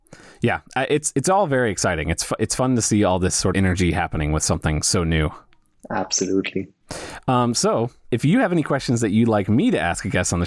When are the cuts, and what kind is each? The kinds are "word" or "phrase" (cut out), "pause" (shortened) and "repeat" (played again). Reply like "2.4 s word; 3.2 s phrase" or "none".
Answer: 3.5 s phrase

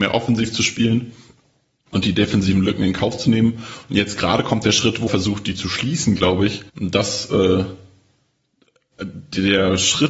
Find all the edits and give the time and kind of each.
5.1 s word; 6.7 s pause

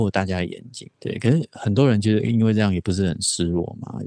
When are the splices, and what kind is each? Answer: 0.9 s pause

